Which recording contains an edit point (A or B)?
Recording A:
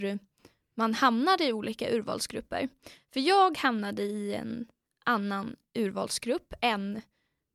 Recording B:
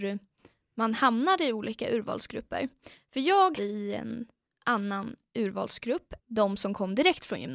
B